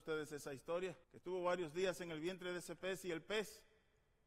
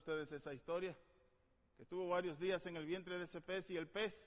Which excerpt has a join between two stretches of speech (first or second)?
first